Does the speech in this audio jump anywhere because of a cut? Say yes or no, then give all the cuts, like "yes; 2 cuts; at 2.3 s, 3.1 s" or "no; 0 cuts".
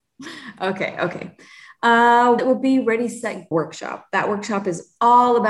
yes; 2 cuts; at 2.4 s, 3.5 s